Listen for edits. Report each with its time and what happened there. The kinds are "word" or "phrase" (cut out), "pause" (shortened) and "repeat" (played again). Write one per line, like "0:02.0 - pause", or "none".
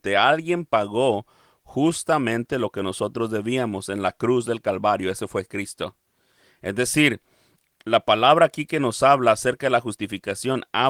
none

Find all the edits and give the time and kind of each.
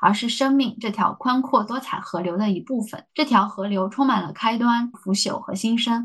0:04.9 - phrase

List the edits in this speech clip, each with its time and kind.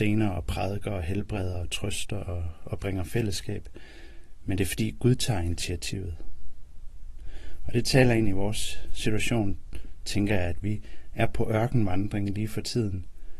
none

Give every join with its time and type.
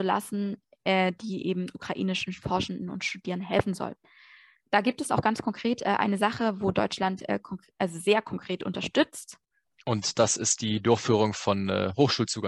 none

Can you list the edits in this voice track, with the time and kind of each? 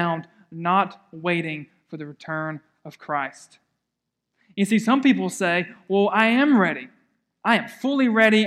none

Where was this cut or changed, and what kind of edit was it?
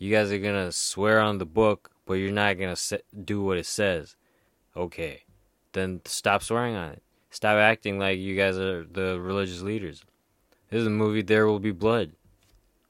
none

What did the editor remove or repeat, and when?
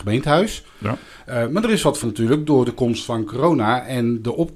0:02.0 - word

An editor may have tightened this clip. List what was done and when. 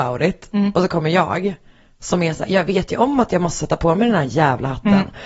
none

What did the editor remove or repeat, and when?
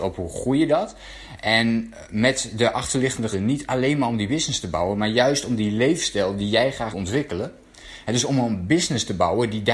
0:03.3 - word
0:06.9 - word

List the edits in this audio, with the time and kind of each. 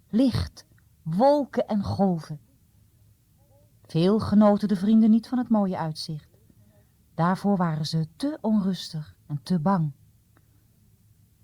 none

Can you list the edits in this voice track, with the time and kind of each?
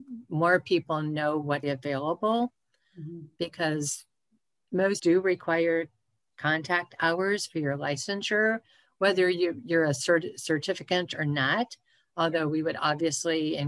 0:01.6 - word
0:05.0 - word

